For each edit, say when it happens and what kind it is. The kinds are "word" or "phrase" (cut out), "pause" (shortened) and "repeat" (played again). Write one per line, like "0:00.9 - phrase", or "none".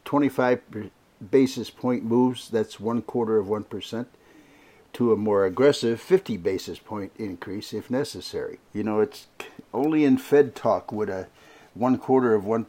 0:08.7 - pause